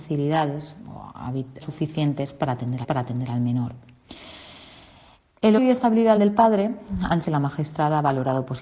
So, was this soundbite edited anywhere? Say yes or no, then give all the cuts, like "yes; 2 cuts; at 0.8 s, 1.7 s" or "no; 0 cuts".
yes; 5 cuts; at 1.6 s, 2.8 s, 5.6 s, 6.2 s, 7.2 s